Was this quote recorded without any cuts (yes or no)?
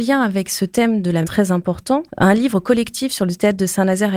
no